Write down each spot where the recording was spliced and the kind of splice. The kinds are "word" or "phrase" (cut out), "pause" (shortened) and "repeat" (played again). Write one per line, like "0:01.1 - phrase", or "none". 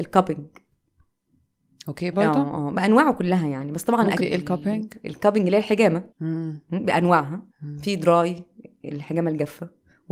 0:02.1 - phrase
0:04.2 - phrase
0:06.1 - pause
0:07.5 - pause

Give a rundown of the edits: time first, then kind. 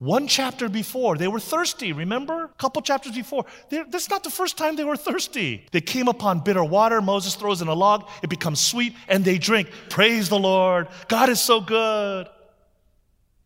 0:02.5 - pause
0:05.7 - pause

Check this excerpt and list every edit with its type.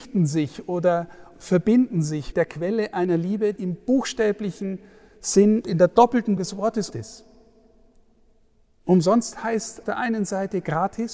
0:01.3 - word
0:02.3 - word
0:03.6 - word
0:05.6 - word
0:06.4 - word
0:06.9 - word
0:09.8 - word

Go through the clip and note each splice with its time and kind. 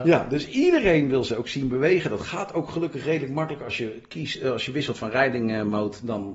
none

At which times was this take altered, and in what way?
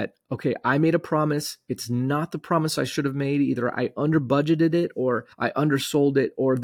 0:05.3 - pause

